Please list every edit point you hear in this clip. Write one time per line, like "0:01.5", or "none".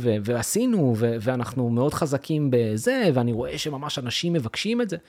none

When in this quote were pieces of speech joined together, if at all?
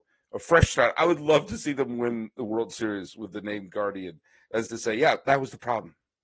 0:04.7

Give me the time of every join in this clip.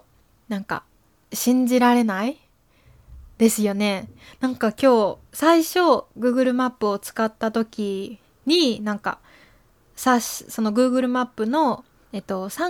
0:05.3

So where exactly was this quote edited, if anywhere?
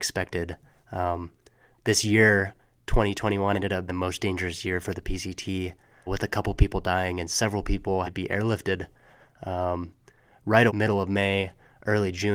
0:03.5
0:03.9
0:06.1
0:08.0
0:10.7

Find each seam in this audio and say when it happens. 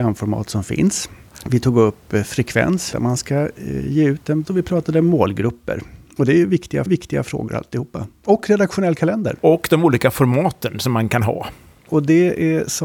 0:02.9
0:04.4
0:06.9

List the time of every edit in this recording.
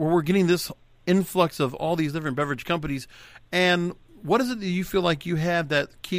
none

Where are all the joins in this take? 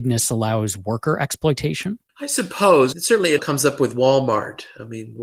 0:02.1
0:02.9
0:03.4

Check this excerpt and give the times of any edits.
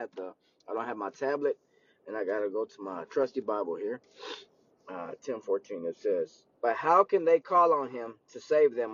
0:06.5

